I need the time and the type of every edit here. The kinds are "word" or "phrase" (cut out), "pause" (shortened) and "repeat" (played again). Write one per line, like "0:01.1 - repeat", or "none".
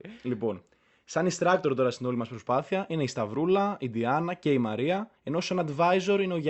0:05.2 - pause